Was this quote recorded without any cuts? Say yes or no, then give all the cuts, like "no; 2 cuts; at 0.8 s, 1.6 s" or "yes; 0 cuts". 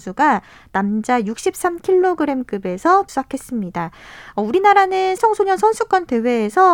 no; 2 cuts; at 3.1 s, 5.2 s